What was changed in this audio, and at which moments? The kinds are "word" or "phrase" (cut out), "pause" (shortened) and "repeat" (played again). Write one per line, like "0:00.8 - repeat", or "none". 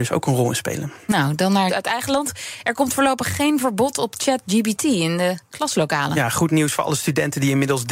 0:01.7 - word